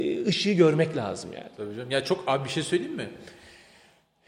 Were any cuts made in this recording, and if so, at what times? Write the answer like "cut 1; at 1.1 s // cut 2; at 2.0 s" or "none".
none

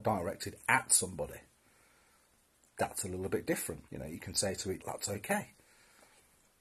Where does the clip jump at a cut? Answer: cut 1; at 3.9 s // cut 2; at 4.8 s

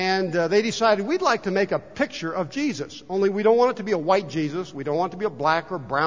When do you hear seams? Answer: none

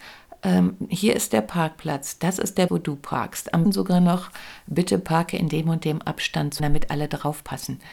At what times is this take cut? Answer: cut 1; at 2.7 s // cut 2; at 3.6 s // cut 3; at 6.6 s

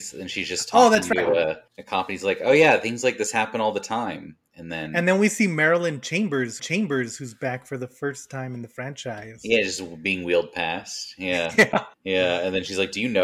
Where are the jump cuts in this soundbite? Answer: cut 1; at 1.7 s // cut 2; at 6.6 s // cut 3; at 11.9 s

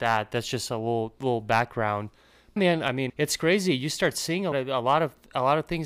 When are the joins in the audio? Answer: cut 1; at 2.6 s // cut 2; at 3.1 s // cut 3; at 4.5 s

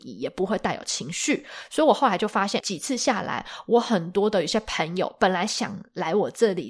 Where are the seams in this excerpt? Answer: cut 1; at 2.6 s

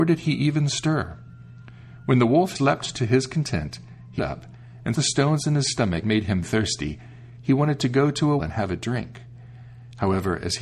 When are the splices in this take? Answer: cut 1; at 2.5 s // cut 2; at 4.2 s // cut 3; at 4.9 s // cut 4; at 6.0 s // cut 5; at 6.4 s // cut 6; at 8.4 s

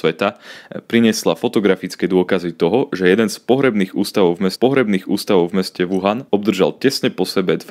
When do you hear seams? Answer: cut 1; at 4.6 s // cut 2; at 6.3 s

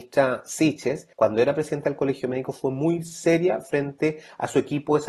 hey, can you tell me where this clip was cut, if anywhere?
cut 1; at 1.1 s

